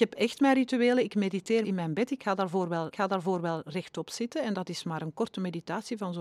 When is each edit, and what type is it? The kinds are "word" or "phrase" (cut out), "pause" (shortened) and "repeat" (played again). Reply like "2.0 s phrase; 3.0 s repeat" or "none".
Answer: 1.6 s word; 2.9 s repeat